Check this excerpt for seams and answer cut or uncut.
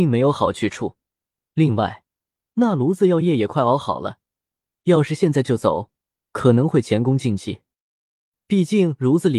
uncut